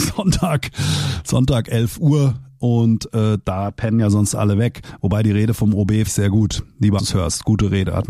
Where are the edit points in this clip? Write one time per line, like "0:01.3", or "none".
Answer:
0:06.1
0:07.0

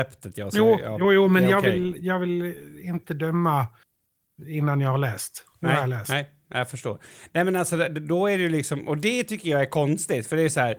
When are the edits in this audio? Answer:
none

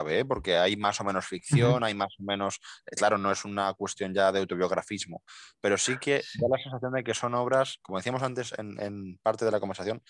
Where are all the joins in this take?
0:07.8

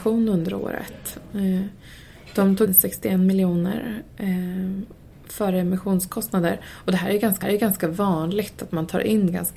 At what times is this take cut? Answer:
0:02.7
0:07.4

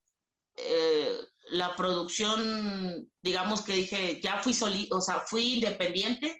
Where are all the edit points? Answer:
0:03.2

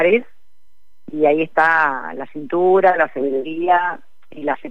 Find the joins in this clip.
none

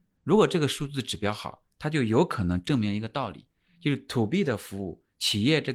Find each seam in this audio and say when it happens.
none

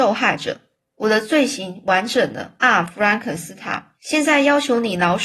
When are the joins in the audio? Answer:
0:02.6
0:04.0

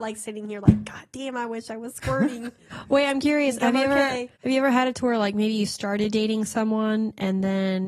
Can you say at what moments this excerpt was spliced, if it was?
0:04.4

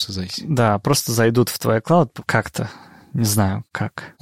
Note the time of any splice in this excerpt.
none

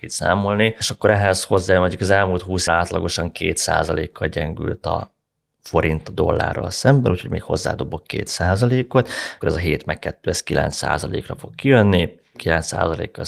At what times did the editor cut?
0:02.7
0:09.4

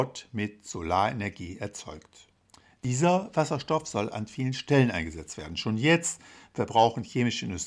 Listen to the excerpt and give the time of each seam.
none

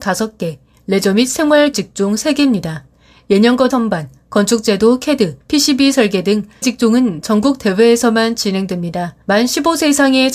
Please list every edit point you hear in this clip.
0:01.7
0:03.7
0:05.4
0:06.6
0:09.2

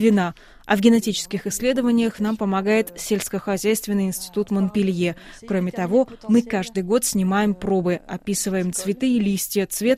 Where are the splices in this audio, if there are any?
none

